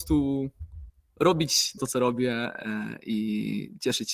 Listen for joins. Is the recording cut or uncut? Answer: cut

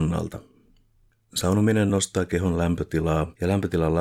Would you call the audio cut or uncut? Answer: uncut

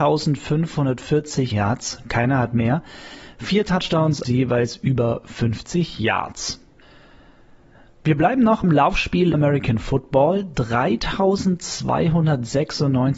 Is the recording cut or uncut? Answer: cut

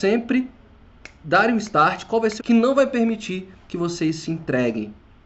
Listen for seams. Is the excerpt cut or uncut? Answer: cut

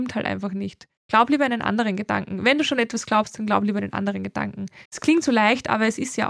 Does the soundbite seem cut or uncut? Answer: cut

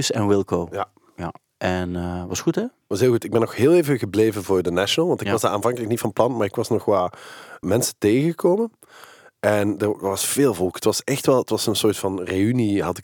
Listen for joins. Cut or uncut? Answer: cut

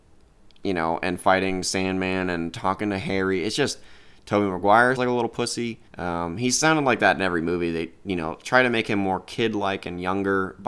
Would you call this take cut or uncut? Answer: cut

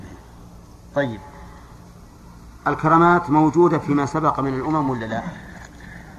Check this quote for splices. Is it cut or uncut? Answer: uncut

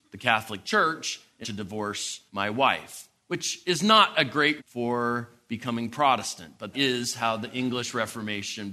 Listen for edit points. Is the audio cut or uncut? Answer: cut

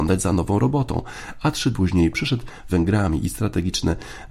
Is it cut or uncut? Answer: cut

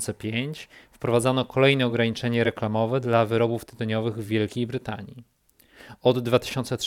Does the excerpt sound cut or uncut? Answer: uncut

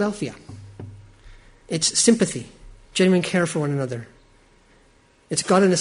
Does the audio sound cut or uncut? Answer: cut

